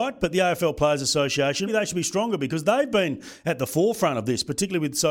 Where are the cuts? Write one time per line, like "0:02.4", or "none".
0:01.7